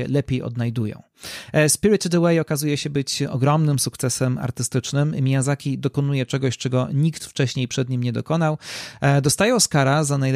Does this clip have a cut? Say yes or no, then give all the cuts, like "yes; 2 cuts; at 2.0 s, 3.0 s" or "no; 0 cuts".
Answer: no; 0 cuts